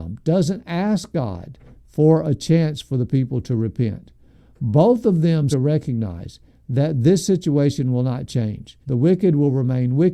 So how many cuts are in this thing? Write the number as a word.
two